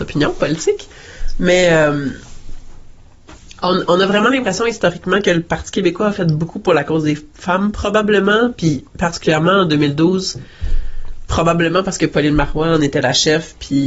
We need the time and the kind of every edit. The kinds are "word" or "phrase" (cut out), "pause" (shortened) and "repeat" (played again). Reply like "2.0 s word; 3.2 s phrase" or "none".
8.9 s pause